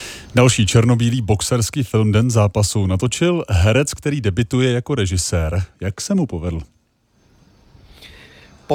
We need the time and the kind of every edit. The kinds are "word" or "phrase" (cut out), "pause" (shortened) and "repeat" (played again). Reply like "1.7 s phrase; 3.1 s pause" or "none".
none